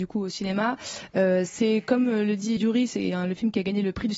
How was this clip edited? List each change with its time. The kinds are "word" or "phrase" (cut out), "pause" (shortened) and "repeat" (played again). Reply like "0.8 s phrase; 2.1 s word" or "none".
2.6 s word